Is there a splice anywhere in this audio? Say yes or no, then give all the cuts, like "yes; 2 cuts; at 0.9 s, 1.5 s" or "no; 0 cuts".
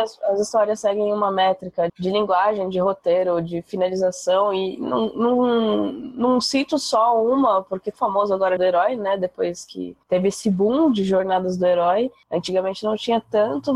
yes; 4 cuts; at 1.9 s, 8.0 s, 8.6 s, 10.0 s